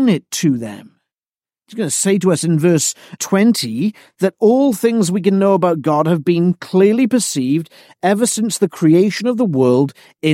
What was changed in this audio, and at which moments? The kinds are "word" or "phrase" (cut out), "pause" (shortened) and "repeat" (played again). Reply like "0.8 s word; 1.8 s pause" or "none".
3.2 s word